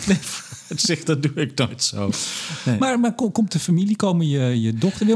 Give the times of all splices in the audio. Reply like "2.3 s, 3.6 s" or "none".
none

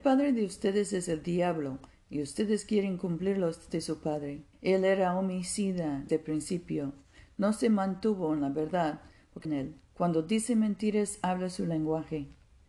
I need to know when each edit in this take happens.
3.7 s, 4.5 s, 6.1 s, 9.4 s, 9.8 s

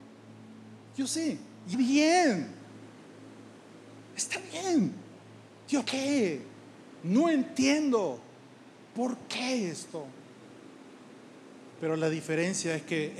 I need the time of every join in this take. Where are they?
1.7 s, 5.9 s

